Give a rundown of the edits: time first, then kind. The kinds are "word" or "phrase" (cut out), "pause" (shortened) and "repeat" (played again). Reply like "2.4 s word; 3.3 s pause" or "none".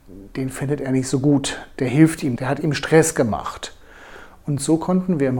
2.4 s word